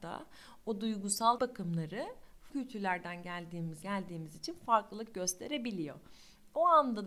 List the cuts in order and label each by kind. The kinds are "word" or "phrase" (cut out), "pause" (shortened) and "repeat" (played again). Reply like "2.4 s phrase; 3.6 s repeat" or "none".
1.4 s phrase; 2.5 s word; 3.8 s phrase